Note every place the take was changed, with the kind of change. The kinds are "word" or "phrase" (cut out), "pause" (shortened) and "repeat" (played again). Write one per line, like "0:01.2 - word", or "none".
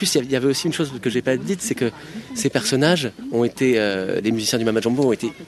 none